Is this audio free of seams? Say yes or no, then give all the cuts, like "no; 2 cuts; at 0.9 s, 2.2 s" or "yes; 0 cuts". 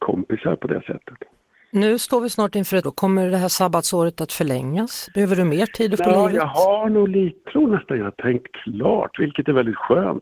no; 3 cuts; at 2.8 s, 6.0 s, 7.4 s